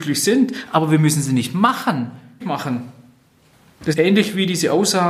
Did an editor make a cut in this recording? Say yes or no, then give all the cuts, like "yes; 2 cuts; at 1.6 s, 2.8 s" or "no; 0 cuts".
yes; 2 cuts; at 2.4 s, 3.9 s